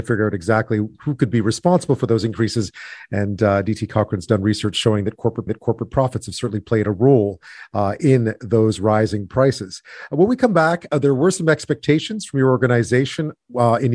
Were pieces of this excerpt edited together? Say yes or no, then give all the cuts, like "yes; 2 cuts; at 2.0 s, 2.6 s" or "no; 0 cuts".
yes; 1 cut; at 5.5 s